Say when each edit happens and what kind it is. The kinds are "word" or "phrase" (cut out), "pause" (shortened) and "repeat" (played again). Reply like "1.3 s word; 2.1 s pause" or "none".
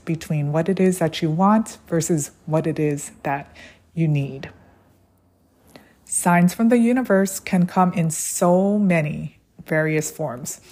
none